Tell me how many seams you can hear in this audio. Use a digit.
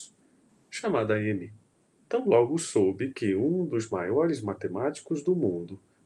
1